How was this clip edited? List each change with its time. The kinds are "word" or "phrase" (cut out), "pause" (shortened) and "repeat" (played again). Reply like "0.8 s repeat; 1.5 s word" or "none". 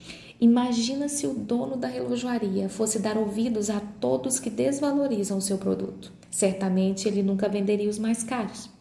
6.2 s pause